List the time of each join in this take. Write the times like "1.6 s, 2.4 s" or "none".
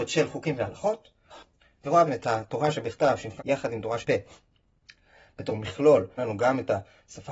2.1 s, 3.4 s, 4.0 s, 5.5 s, 6.2 s